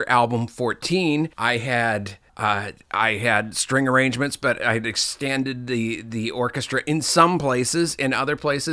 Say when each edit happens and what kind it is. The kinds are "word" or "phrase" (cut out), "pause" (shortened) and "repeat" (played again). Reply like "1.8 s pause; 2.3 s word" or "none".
1.3 s pause; 2.3 s pause